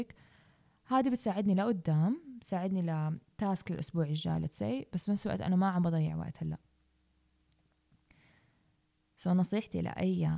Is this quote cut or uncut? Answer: uncut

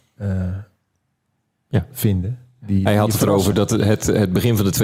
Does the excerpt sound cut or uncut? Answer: uncut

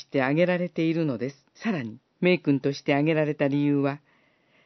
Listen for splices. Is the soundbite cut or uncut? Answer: cut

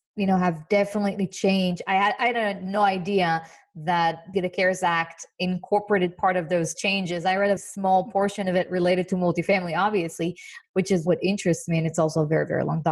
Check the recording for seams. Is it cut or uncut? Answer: cut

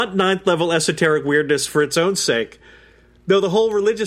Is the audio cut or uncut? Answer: uncut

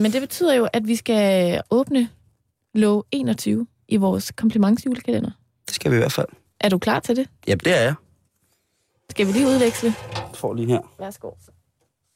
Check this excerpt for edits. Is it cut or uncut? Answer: uncut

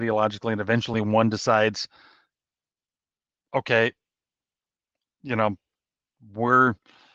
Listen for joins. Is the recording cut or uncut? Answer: uncut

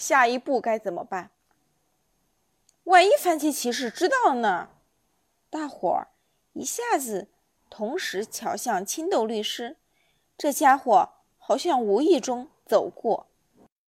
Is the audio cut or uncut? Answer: uncut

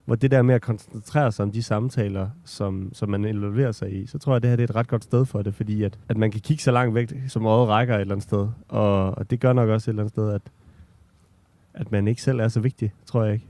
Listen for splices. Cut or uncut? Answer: cut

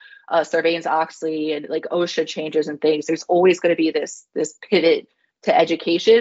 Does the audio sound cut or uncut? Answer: uncut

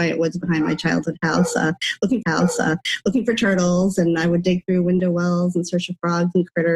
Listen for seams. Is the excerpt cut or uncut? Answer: cut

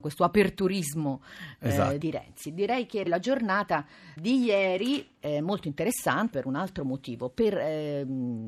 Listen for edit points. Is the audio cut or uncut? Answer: cut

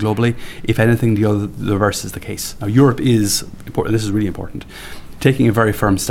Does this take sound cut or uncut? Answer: uncut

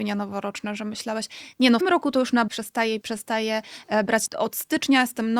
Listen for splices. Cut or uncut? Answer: cut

